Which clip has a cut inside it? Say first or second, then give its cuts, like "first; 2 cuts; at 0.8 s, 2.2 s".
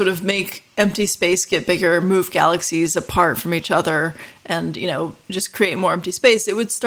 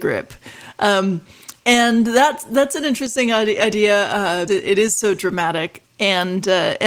second; 3 cuts; at 1.6 s, 4.5 s, 5.8 s